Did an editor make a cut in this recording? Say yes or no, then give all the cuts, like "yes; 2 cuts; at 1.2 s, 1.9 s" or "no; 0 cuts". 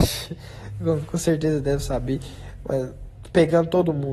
no; 0 cuts